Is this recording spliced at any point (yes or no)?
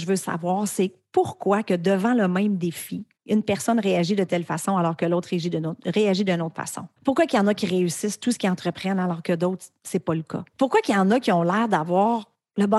yes